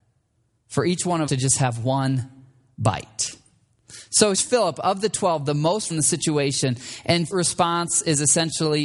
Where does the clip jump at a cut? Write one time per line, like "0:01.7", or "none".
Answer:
0:01.3
0:04.3
0:05.9
0:07.3